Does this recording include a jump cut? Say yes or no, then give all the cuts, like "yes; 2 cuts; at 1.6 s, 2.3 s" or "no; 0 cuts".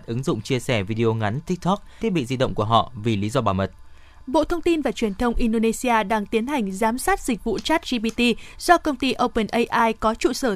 yes; 1 cut; at 2.0 s